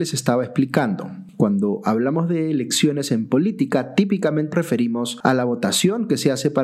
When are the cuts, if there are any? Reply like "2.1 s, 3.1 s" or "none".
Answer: 4.5 s